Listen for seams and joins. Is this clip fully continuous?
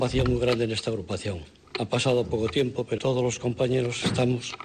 no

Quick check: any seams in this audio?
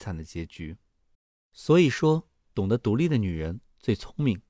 yes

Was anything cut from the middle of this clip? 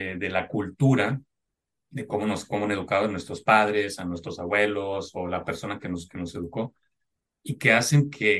no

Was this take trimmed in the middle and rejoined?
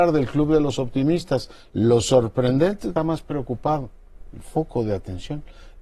yes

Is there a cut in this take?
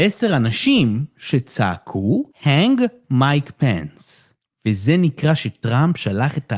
yes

